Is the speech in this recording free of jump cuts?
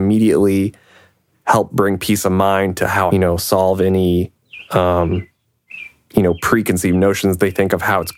no; 1 cut; at 3.1 s

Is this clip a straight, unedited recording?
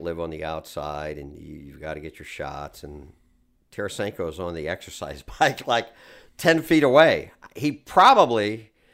yes; 0 cuts

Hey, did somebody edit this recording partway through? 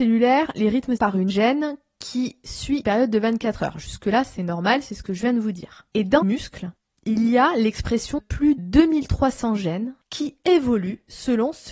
yes; 8 cuts; at 1.0 s, 1.3 s, 2.8 s, 5.9 s, 6.2 s, 8.2 s, 8.6 s, 10.0 s

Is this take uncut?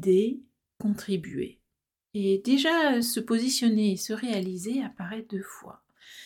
yes; 0 cuts

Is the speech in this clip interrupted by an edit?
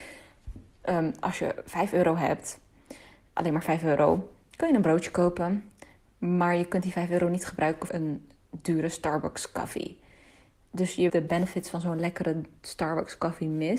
yes; 2 cuts; at 7.9 s, 11.1 s

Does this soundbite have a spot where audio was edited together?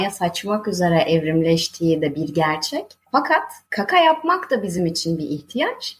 no; 0 cuts

